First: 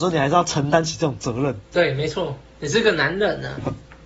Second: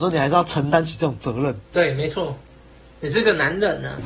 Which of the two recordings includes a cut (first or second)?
first